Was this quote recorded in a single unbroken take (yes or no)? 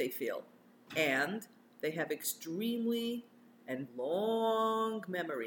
no